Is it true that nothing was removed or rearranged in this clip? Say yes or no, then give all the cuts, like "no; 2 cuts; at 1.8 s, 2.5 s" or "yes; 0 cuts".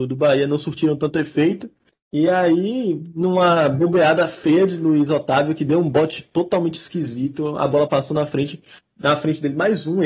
yes; 0 cuts